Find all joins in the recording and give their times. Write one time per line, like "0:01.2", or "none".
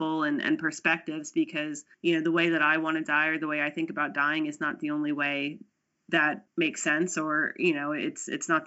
0:01.9
0:06.5